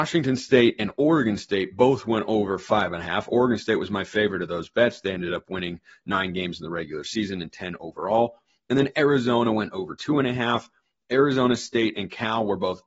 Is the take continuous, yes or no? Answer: yes